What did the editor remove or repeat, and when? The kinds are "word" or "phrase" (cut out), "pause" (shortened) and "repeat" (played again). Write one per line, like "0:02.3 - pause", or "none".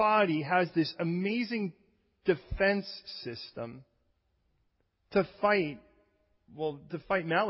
none